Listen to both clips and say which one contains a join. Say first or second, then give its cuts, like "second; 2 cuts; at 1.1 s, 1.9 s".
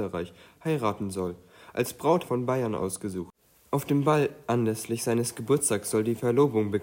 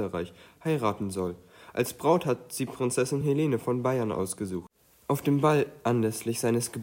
first; 1 cut; at 2.2 s